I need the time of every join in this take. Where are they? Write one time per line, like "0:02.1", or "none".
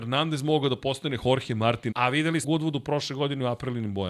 0:01.9
0:02.4

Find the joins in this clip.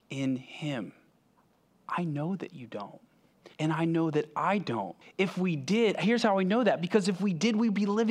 0:01.4
0:03.5
0:05.0

